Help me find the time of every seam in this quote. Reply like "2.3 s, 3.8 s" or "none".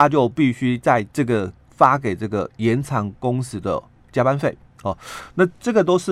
1.1 s